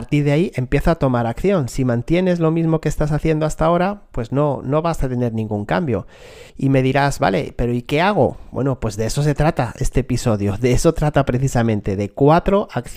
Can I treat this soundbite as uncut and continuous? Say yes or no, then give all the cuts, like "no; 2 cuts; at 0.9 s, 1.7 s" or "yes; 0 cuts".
no; 1 cut; at 6.5 s